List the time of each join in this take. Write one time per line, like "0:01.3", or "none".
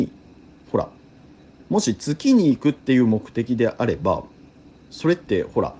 none